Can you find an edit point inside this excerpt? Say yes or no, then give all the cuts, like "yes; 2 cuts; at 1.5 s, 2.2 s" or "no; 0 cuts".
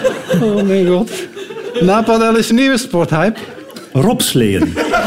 yes; 1 cut; at 2.5 s